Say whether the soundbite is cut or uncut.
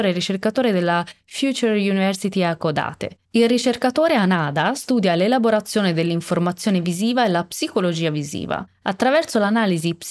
cut